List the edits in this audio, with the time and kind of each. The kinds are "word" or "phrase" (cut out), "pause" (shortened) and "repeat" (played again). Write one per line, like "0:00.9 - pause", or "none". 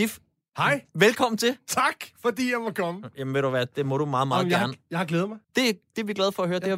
0:05.4 - pause